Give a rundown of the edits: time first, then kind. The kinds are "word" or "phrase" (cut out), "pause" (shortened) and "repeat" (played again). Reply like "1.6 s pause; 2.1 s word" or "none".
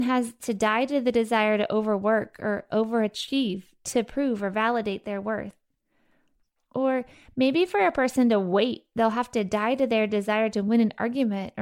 none